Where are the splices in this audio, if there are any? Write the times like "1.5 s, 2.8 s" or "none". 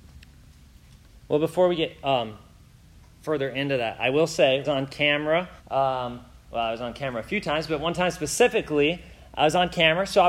4.6 s, 5.6 s

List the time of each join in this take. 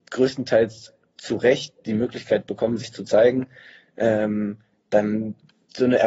none

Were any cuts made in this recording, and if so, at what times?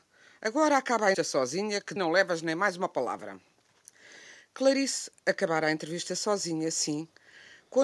1.1 s, 2.0 s

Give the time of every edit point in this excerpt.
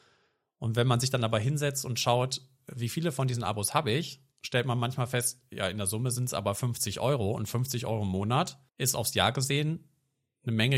4.3 s, 8.7 s

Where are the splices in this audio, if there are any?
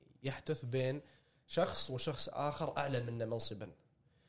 none

